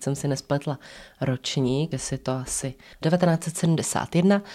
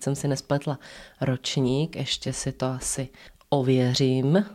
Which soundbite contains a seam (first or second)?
first